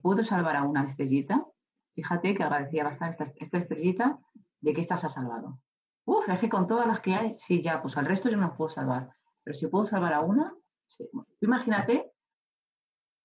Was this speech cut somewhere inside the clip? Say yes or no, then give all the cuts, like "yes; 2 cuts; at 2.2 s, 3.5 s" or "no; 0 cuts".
no; 0 cuts